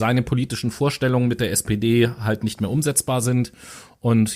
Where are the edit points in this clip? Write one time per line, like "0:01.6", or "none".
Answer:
none